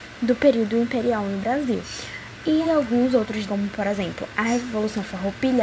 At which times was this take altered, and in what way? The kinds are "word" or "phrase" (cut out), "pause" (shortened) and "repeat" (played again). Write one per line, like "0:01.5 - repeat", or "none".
0:02.6 - word
0:03.5 - word